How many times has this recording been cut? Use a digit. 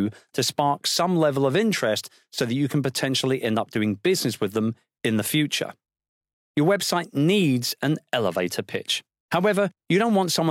0